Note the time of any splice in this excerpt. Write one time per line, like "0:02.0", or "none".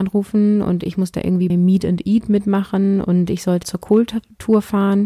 0:01.5
0:03.6